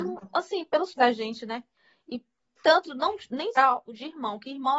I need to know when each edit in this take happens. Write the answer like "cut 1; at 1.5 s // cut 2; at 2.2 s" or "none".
cut 1; at 1.0 s // cut 2; at 2.6 s // cut 3; at 3.6 s